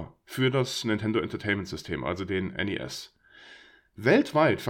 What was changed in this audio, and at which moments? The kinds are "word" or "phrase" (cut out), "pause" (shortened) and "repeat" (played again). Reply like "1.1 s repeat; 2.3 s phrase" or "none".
none